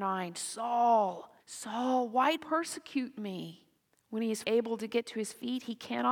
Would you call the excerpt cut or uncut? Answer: cut